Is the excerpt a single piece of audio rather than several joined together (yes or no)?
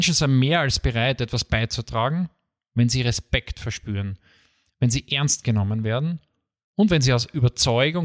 yes